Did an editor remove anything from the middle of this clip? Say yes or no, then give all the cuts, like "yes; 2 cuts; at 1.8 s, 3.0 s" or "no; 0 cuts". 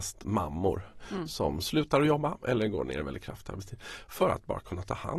no; 0 cuts